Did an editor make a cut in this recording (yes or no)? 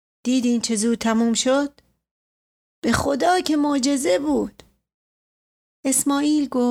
no